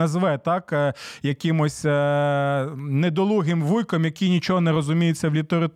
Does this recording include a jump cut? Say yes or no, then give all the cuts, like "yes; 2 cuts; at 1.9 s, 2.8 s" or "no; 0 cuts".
no; 0 cuts